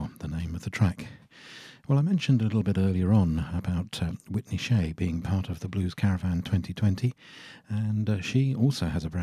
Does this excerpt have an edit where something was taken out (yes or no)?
no